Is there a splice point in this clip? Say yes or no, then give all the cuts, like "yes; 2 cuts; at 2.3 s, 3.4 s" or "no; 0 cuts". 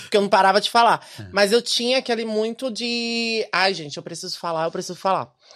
no; 0 cuts